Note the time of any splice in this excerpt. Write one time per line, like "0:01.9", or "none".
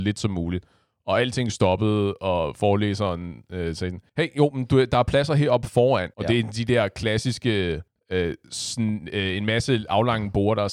0:04.1
0:06.1
0:07.9